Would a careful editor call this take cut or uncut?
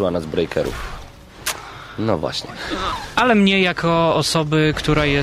uncut